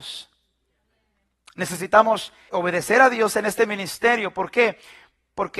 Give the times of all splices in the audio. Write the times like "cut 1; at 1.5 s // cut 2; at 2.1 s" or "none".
cut 1; at 2.5 s